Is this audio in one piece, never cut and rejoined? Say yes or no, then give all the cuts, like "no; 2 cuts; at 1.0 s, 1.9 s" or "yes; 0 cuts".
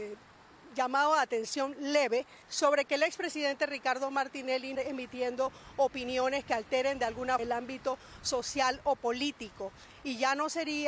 no; 3 cuts; at 2.4 s, 4.7 s, 7.4 s